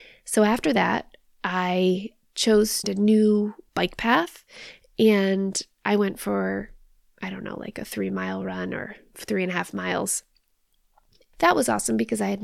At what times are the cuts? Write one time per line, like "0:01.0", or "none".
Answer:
0:02.8
0:03.7